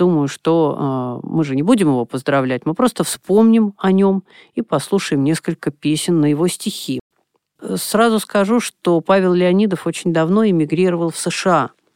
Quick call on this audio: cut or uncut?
uncut